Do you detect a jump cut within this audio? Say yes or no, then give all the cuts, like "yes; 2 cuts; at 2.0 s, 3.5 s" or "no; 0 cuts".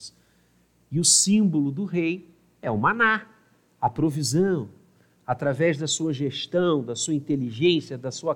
no; 0 cuts